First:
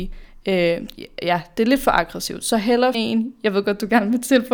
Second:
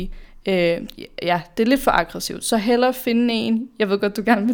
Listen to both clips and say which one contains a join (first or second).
first